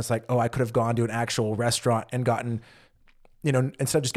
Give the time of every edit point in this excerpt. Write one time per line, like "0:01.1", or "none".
none